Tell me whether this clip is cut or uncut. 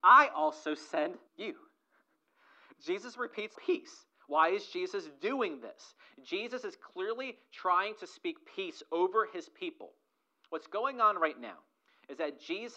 cut